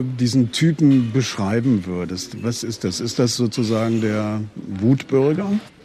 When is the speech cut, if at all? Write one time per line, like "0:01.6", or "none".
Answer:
none